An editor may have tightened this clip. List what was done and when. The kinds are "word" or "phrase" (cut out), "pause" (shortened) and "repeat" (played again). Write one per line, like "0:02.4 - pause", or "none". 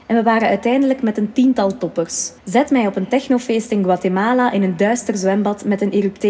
0:02.4 - pause